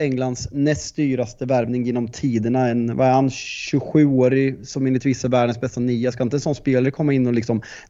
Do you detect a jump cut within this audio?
no; 0 cuts

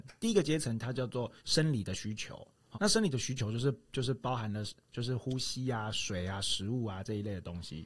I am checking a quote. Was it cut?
yes; 2 cuts; at 1.4 s, 2.7 s

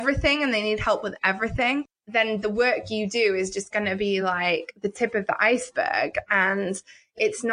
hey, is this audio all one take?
yes; 0 cuts

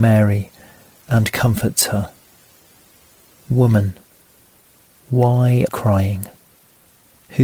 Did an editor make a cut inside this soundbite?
yes; 1 cut; at 5.7 s

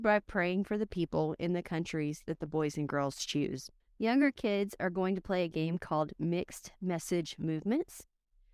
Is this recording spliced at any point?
yes; 1 cut; at 3.8 s

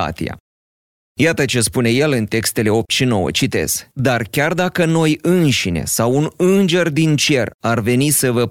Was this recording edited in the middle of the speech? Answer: yes; 1 cut; at 3.9 s

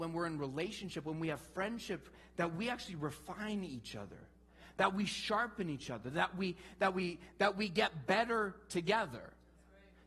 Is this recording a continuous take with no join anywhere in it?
yes; 0 cuts

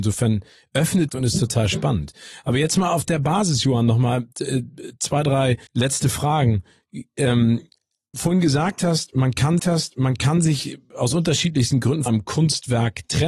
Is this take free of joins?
no; 5 cuts; at 1.1 s, 5.7 s, 8.1 s, 9.6 s, 12.1 s

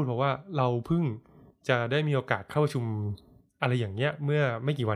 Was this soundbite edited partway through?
no; 0 cuts

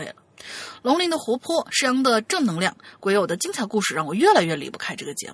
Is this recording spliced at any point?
no; 0 cuts

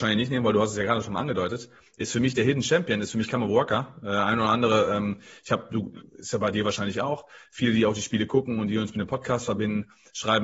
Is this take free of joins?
yes; 0 cuts

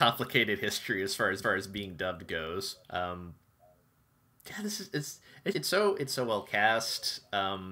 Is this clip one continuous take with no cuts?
no; 3 cuts; at 1.4 s, 2.8 s, 5.5 s

